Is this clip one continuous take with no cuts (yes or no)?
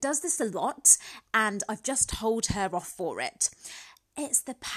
yes